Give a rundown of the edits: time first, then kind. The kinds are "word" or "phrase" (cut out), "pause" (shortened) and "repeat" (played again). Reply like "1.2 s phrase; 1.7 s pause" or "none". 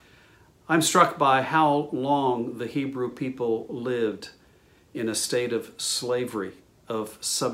none